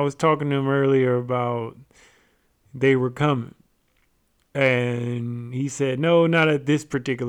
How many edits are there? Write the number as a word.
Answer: zero